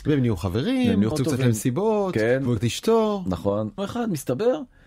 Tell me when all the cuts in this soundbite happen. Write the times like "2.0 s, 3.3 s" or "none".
1.1 s, 2.6 s, 3.8 s